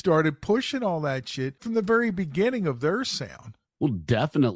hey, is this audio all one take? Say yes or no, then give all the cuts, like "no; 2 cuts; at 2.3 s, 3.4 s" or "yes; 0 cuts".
no; 1 cut; at 1.6 s